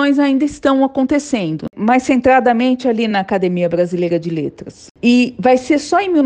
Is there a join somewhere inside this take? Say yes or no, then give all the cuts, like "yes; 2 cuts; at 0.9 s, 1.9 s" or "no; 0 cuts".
no; 0 cuts